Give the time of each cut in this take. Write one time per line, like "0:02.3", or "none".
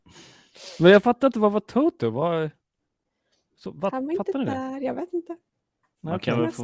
none